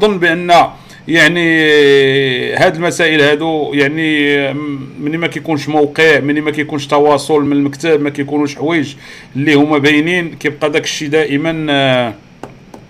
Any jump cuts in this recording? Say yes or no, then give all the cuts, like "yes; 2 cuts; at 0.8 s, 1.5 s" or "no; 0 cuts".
no; 0 cuts